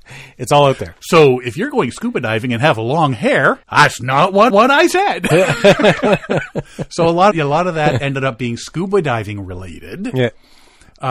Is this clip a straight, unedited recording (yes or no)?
no